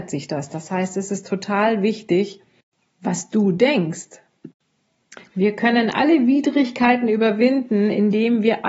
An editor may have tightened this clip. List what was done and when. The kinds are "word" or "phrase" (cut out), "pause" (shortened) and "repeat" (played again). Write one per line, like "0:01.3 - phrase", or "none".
none